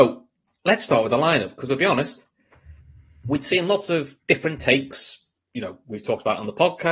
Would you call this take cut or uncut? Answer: uncut